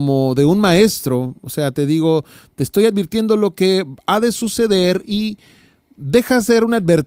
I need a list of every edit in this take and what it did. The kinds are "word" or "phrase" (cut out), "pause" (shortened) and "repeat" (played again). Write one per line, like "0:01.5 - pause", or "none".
none

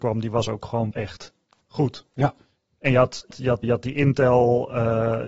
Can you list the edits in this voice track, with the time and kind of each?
0:00.9 - word
0:03.3 - word
0:03.6 - word

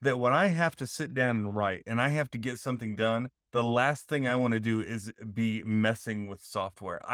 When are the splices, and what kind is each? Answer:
none

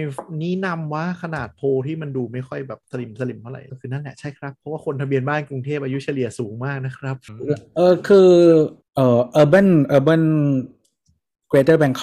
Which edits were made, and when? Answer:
0:02.8 - pause

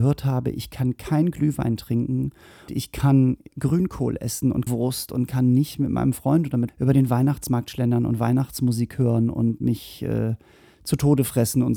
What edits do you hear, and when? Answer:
0:02.7 - word
0:03.5 - word
0:04.7 - word
0:06.7 - word

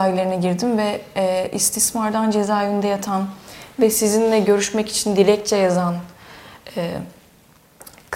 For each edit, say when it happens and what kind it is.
none

